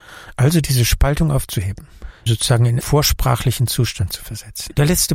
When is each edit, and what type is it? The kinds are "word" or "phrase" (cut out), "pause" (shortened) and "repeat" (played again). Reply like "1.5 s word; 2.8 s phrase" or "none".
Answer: 2.3 s word; 2.8 s word